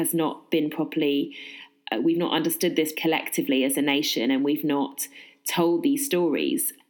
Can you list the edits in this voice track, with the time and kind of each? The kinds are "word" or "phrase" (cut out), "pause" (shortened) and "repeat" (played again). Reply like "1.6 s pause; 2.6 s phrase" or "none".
2.9 s word